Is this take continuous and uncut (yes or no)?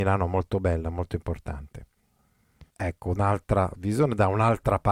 no